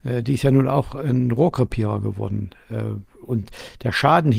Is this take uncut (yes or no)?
yes